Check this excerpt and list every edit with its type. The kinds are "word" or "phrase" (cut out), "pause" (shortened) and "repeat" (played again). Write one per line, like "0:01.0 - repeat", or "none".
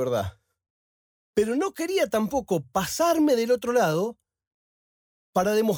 none

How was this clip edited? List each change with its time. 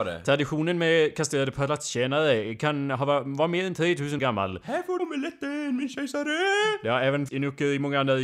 0:04.2 - word
0:05.0 - word
0:07.3 - word

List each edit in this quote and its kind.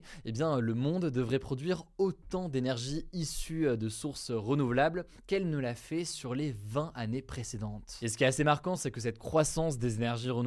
none

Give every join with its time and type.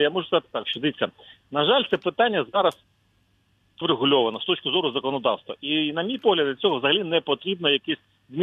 0:03.8 - word

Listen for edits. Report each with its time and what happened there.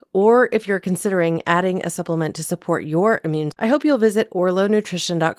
0:03.5 - word

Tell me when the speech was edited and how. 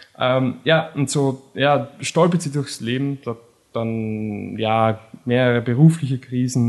none

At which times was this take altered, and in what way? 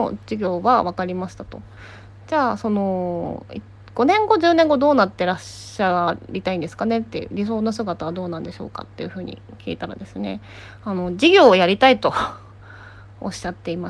none

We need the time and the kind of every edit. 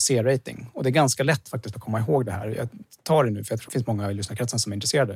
0:03.7 - word

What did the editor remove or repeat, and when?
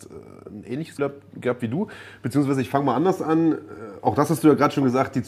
0:01.0 - word

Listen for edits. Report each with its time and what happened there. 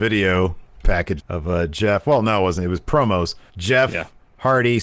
0:01.2 - word
0:03.5 - pause

